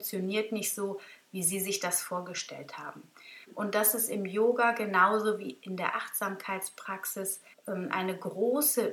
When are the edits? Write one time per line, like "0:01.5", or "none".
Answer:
0:03.4
0:07.5